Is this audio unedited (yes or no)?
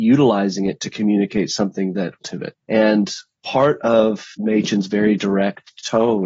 no